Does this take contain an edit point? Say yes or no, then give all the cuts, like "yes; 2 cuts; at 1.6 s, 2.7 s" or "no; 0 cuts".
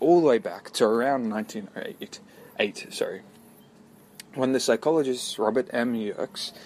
no; 0 cuts